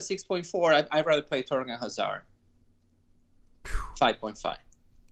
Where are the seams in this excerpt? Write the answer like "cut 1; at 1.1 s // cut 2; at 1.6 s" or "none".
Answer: none

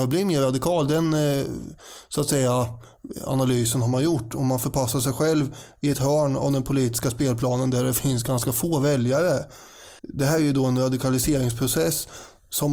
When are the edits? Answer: cut 1; at 10.0 s

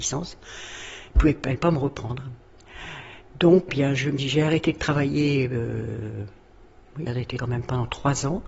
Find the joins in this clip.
cut 1; at 1.1 s // cut 2; at 1.6 s // cut 3; at 3.7 s // cut 4; at 4.2 s // cut 5; at 7.1 s // cut 6; at 7.4 s

